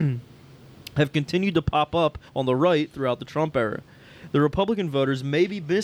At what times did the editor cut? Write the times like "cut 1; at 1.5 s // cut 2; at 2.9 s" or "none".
cut 1; at 2.3 s